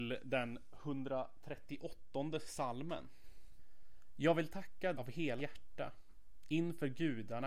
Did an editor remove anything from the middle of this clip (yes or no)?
yes